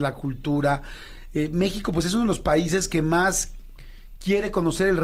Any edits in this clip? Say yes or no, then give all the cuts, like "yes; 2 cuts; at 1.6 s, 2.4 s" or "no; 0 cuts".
no; 0 cuts